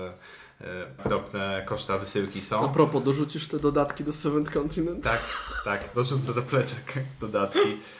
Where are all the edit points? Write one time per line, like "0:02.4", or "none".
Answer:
0:01.0
0:05.9